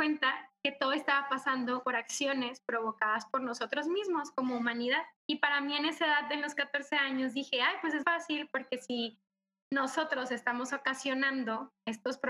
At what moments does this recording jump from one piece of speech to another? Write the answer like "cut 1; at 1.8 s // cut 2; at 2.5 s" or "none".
cut 1; at 1.8 s // cut 2; at 5.2 s // cut 3; at 8.0 s